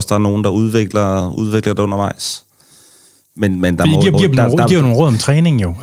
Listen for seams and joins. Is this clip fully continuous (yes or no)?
no